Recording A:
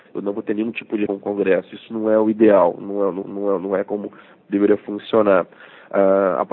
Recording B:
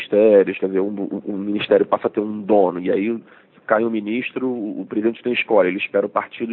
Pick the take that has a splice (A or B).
A